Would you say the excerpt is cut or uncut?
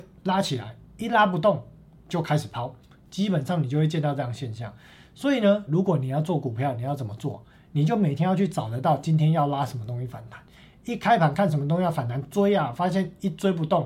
cut